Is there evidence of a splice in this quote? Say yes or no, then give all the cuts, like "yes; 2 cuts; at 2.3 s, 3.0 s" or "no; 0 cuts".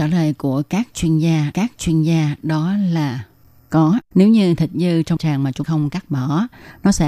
yes; 4 cuts; at 1.5 s, 4.0 s, 5.2 s, 5.6 s